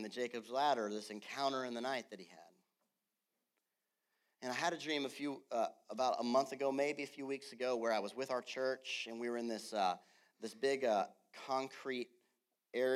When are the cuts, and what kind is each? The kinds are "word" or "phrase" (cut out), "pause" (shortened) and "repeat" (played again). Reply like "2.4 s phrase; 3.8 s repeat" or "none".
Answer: none